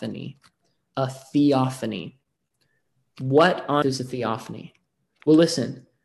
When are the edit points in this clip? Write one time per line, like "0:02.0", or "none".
0:03.8